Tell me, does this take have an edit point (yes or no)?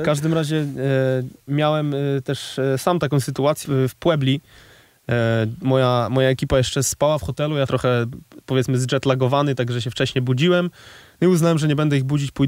yes